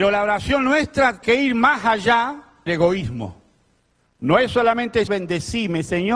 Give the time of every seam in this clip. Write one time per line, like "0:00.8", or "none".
0:01.2
0:02.7
0:05.1